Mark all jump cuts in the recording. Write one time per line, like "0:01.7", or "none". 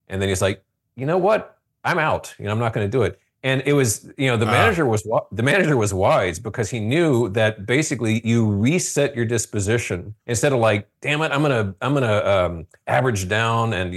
0:01.7
0:10.2